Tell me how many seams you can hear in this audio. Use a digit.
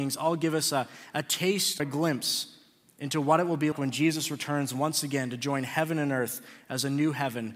2